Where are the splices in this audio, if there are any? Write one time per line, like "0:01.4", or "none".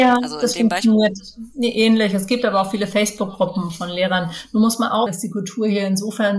0:05.1